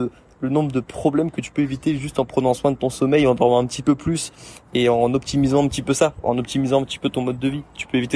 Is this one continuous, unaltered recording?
yes; 0 cuts

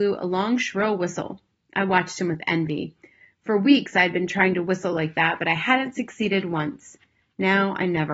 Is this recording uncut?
yes; 0 cuts

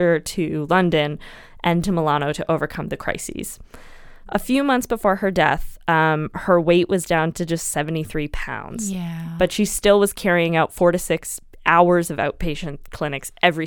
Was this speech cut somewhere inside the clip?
yes; 1 cut; at 1.8 s

